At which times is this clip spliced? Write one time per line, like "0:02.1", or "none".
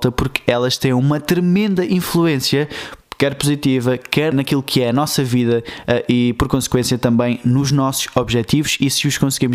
0:03.0
0:04.3